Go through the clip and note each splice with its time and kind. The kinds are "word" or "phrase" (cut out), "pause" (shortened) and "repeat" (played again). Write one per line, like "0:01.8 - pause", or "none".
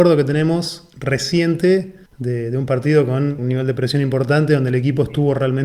0:02.1 - pause
0:03.4 - word